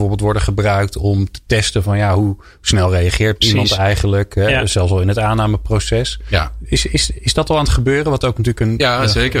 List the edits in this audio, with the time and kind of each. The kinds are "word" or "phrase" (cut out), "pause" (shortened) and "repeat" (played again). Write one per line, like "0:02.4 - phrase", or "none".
none

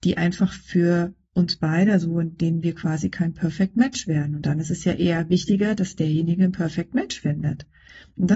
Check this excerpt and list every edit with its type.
none

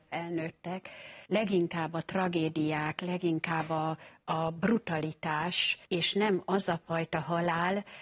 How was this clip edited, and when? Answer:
0:01.3 - pause
0:05.9 - pause

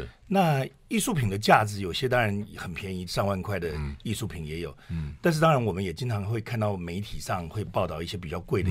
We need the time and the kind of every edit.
0:03.1 - phrase

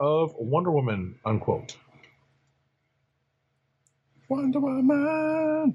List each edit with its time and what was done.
none

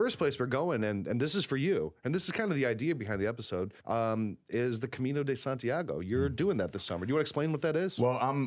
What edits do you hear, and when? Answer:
0:03.8 - pause

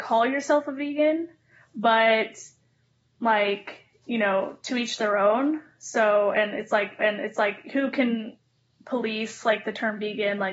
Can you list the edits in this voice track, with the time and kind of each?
0:07.0 - repeat

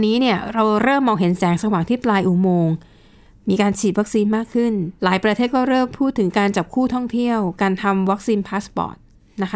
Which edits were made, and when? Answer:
0:05.0 - pause

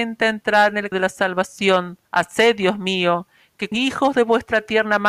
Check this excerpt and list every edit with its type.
0:00.9 - word
0:02.0 - pause
0:03.7 - word

